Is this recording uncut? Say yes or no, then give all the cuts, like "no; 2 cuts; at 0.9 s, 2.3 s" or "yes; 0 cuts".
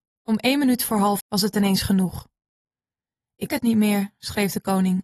no; 2 cuts; at 1.2 s, 3.5 s